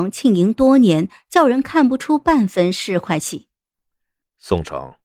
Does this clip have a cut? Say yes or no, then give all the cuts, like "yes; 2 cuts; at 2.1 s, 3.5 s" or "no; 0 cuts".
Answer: no; 0 cuts